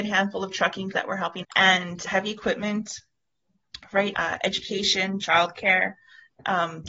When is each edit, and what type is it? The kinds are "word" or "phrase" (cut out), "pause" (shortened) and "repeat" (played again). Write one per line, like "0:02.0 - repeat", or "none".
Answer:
0:00.9 - word
0:01.4 - word
0:02.1 - word
0:04.1 - word